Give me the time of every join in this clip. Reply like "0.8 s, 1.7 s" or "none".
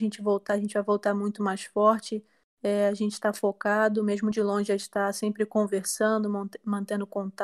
4.8 s